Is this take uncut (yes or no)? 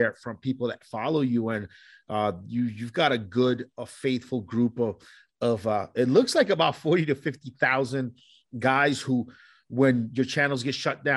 yes